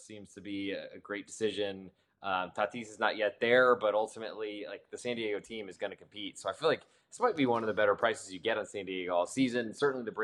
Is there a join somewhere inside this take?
no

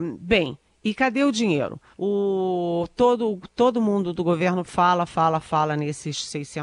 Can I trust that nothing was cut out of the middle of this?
no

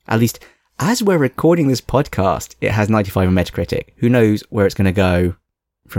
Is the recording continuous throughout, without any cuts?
yes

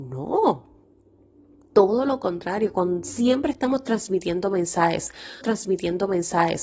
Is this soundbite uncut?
no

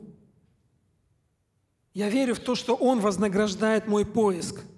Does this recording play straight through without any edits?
yes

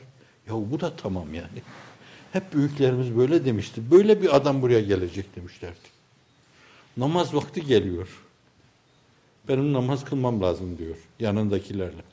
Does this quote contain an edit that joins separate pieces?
no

